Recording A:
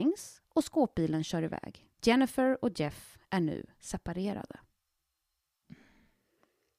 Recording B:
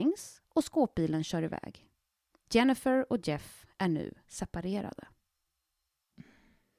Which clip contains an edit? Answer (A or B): A